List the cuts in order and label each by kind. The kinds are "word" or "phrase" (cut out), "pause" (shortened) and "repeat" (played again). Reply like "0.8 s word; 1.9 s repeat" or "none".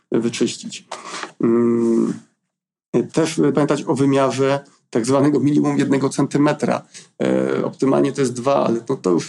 3.5 s word